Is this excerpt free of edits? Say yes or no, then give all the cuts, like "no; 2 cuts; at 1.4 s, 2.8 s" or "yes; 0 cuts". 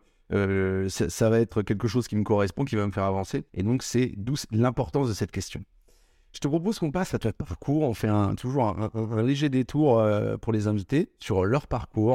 no; 1 cut; at 3.5 s